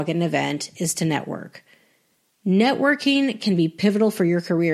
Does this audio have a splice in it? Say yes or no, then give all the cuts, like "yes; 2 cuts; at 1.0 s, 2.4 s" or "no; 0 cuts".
no; 0 cuts